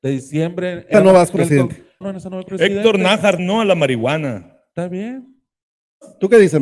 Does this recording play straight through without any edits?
no; 5 cuts; at 0.9 s, 1.4 s, 2.0 s, 2.5 s, 3.4 s

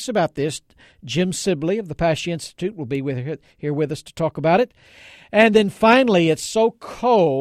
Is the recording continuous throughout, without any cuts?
yes; 0 cuts

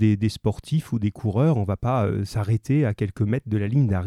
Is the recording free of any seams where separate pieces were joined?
yes; 0 cuts

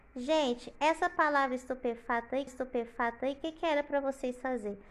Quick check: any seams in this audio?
yes; 1 cut; at 2.5 s

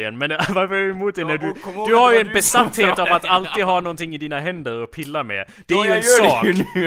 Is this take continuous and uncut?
yes; 0 cuts

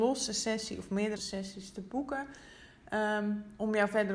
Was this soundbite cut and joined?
yes; 1 cut; at 1.2 s

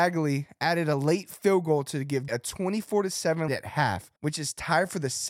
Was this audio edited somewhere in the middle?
yes; 3 cuts; at 2.3 s, 3.5 s, 4.2 s

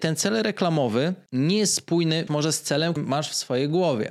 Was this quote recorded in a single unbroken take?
no; 2 cuts; at 2.3 s, 3.0 s

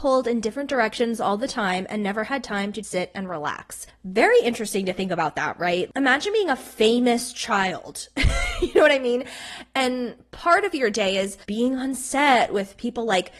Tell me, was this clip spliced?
yes; 1 cut; at 2.8 s

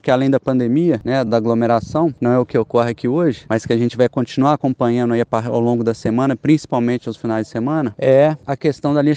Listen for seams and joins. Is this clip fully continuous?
no; 1 cut; at 1.3 s

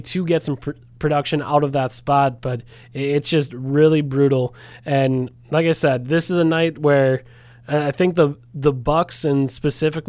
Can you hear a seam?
no; 0 cuts

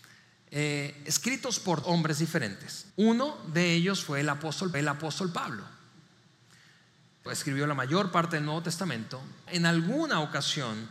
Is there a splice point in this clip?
yes; 5 cuts; at 1.8 s, 2.9 s, 4.7 s, 7.3 s, 9.5 s

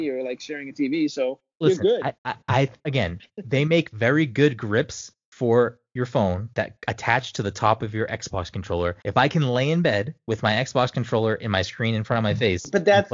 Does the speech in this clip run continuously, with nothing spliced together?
no; 2 cuts; at 2.2 s, 9.0 s

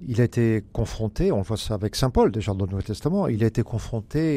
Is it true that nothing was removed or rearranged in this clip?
yes; 0 cuts

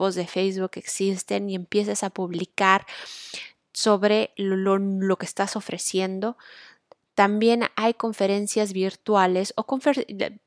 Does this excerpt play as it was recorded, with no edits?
yes; 0 cuts

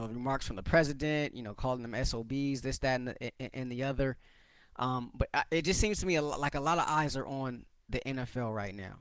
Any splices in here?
no; 0 cuts

